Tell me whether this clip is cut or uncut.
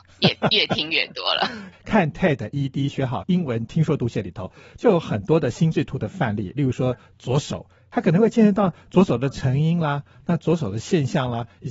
uncut